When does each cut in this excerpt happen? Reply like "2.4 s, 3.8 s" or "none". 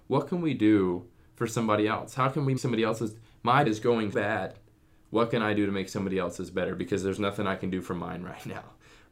2.6 s, 3.7 s, 4.1 s